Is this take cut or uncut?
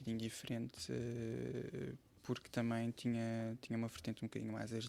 uncut